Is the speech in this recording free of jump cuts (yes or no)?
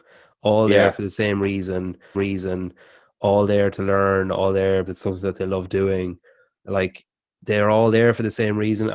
no